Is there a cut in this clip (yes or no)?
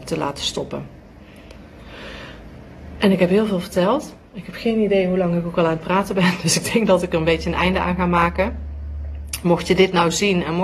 no